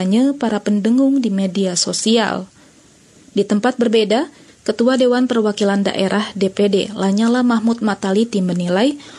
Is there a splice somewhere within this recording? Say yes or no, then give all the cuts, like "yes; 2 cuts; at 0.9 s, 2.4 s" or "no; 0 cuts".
no; 0 cuts